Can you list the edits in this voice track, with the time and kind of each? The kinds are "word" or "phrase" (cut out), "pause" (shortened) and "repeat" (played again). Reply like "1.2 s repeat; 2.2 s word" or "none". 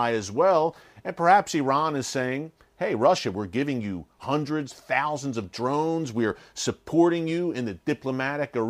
none